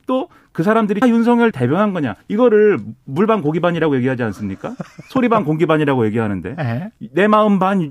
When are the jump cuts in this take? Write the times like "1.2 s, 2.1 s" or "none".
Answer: 1.0 s, 1.5 s, 2.2 s